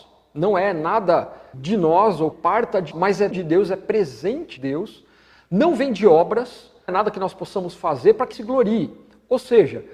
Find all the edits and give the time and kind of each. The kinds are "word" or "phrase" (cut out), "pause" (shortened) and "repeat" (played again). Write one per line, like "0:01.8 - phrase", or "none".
0:01.5 - word
0:02.3 - word
0:02.9 - word
0:03.3 - word
0:04.6 - word
0:06.9 - word
0:08.3 - word